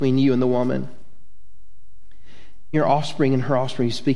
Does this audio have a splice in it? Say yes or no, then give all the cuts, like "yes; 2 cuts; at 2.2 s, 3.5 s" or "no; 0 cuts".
yes; 1 cut; at 2.7 s